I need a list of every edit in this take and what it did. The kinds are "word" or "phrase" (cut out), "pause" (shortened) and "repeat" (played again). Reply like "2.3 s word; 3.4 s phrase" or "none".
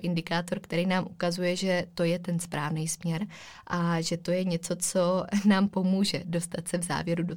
none